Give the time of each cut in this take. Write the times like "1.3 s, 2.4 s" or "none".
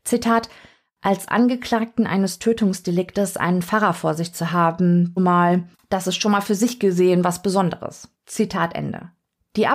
5.2 s, 5.7 s

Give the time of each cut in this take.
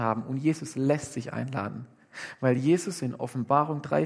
none

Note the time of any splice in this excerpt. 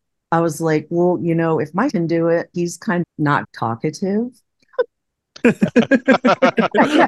1.9 s, 2.5 s, 3.0 s, 3.4 s

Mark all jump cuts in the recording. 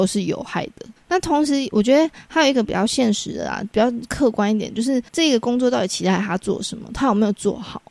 5.1 s

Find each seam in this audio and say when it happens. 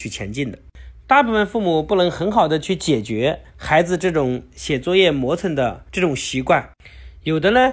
3.5 s, 5.9 s

